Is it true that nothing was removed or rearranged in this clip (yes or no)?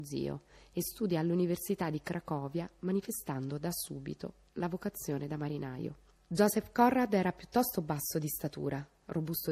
no